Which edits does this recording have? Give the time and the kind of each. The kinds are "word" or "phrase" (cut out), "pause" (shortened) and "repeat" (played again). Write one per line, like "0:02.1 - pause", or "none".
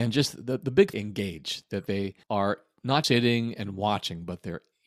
0:00.9 - phrase
0:01.9 - word
0:02.2 - pause
0:03.0 - word